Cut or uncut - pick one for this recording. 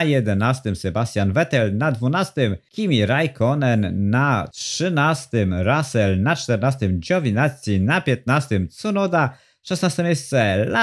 uncut